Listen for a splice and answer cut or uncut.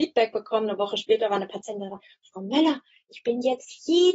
uncut